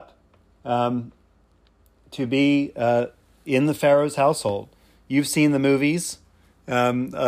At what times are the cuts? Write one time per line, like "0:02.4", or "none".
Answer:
none